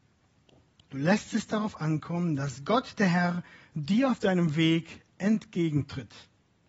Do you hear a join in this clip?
no; 0 cuts

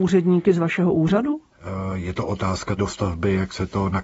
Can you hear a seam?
yes; 1 cut; at 2.8 s

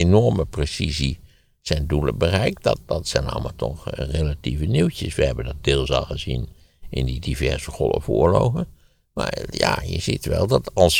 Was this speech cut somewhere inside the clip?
no; 0 cuts

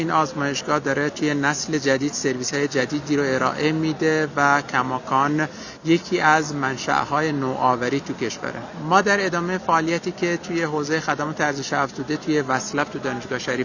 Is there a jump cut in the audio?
no; 0 cuts

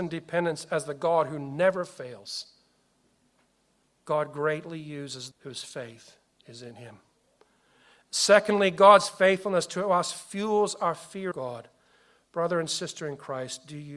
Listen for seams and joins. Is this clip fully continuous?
no; 2 cuts; at 5.3 s, 11.3 s

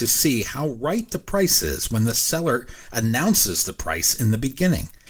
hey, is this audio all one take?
yes; 0 cuts

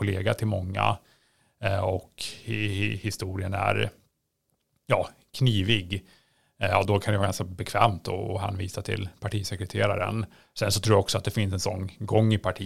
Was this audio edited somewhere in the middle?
yes; 1 cut; at 6.9 s

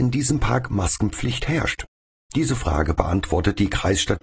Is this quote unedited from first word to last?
yes; 0 cuts

